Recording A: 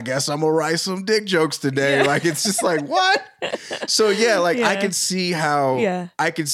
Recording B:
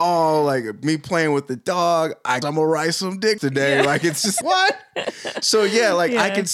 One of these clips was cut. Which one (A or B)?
B